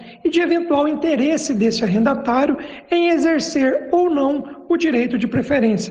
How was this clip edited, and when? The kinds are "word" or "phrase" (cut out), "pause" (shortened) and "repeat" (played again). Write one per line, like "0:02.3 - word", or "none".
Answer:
none